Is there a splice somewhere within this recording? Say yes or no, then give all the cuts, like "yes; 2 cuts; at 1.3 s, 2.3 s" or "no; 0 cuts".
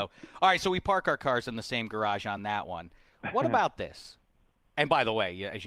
no; 0 cuts